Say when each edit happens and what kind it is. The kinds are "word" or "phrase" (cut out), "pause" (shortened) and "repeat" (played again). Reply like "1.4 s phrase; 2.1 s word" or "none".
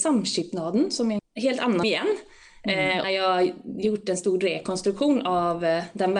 1.2 s word; 1.8 s word; 3.0 s word